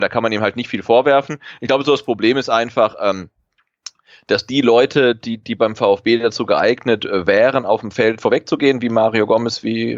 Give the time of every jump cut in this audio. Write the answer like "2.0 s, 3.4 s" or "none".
none